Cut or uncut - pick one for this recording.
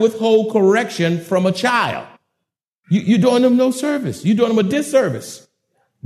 uncut